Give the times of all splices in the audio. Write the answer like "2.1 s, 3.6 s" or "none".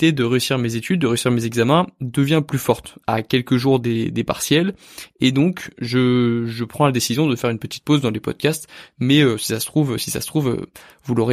none